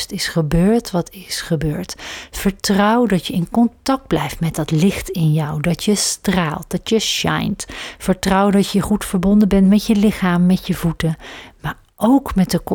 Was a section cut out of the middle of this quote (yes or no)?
no